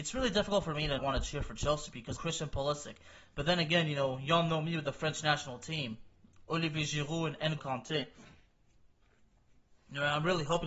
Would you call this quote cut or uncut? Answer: cut